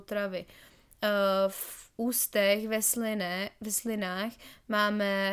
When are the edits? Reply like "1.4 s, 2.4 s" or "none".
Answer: none